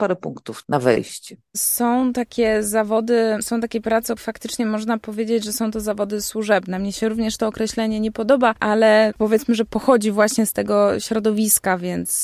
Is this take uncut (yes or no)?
no